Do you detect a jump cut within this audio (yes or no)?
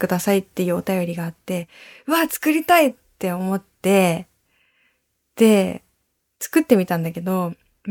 no